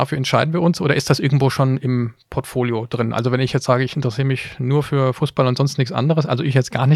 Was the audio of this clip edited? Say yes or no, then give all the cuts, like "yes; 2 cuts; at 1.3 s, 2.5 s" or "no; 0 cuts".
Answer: no; 0 cuts